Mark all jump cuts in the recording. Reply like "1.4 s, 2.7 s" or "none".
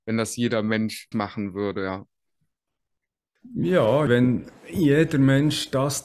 1.1 s, 4.1 s